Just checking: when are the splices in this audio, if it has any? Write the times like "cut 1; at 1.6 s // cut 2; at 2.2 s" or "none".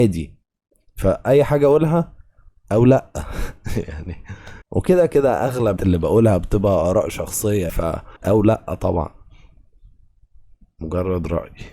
cut 1; at 4.6 s // cut 2; at 5.8 s // cut 3; at 7.7 s // cut 4; at 8.2 s